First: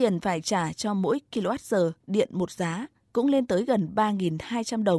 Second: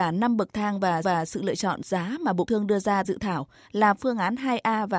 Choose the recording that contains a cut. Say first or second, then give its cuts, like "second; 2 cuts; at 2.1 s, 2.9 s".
second; 4 cuts; at 1.0 s, 1.8 s, 2.5 s, 3.0 s